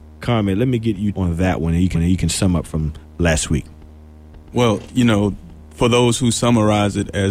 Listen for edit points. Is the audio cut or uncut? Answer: cut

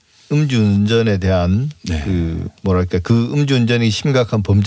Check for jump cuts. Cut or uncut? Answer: uncut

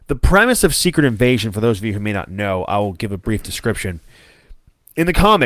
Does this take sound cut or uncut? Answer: uncut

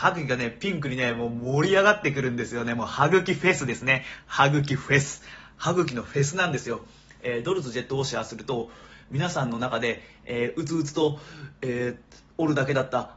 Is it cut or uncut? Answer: uncut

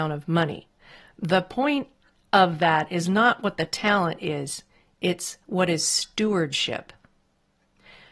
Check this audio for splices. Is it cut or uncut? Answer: uncut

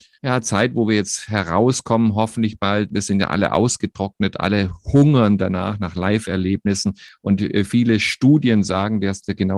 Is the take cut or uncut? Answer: uncut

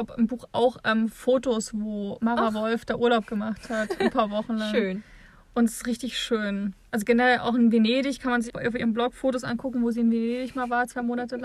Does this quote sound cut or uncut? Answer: cut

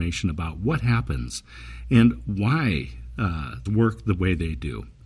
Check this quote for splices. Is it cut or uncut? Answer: cut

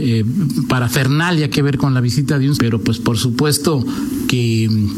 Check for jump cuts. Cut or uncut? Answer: cut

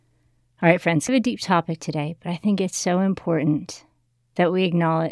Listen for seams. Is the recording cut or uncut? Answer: cut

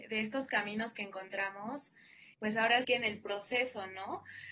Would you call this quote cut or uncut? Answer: cut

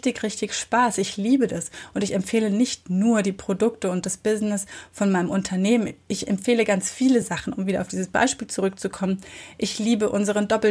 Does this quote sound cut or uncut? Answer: uncut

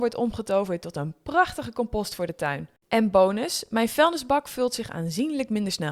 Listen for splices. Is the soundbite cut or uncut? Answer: cut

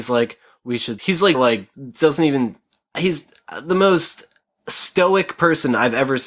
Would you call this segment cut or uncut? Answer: cut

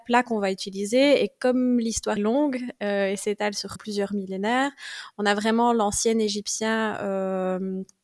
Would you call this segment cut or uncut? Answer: cut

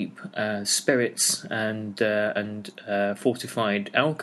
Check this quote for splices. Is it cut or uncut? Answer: uncut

